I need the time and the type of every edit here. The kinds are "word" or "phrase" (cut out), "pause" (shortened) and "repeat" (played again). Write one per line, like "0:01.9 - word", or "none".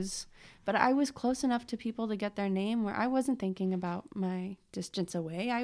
none

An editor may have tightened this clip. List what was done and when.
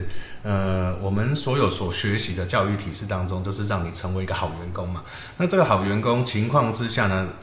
none

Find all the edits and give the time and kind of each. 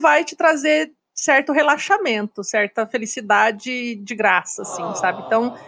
none

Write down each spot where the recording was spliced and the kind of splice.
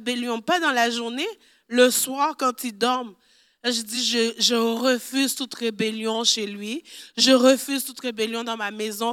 none

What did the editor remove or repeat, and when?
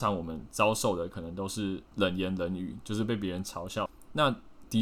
0:01.9 - pause

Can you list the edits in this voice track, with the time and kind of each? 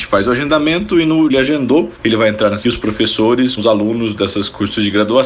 0:01.3 - phrase
0:02.6 - phrase
0:03.6 - word

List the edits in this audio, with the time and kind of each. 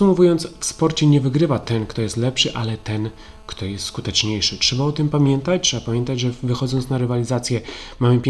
none

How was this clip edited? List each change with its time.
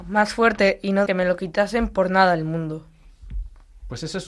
0:01.1 - word

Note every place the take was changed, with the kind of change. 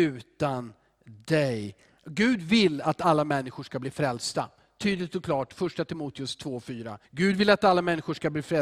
0:07.0 - pause

